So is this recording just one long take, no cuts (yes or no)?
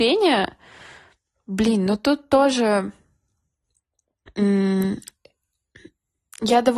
yes